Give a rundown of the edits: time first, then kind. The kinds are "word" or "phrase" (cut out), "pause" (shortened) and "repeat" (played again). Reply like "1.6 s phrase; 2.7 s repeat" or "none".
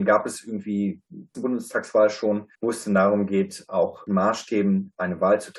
1.3 s phrase; 2.5 s pause; 4.1 s phrase